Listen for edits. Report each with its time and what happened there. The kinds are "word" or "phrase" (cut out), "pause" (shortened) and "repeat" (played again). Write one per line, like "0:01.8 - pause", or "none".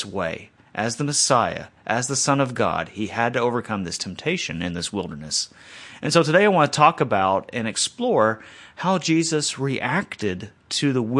none